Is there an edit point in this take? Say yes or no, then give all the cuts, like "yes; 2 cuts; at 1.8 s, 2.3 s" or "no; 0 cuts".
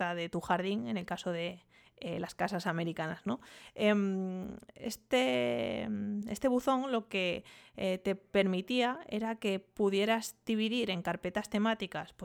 no; 0 cuts